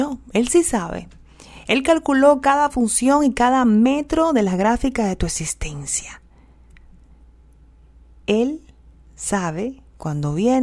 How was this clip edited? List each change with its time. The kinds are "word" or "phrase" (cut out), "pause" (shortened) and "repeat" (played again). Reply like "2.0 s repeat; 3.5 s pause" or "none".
none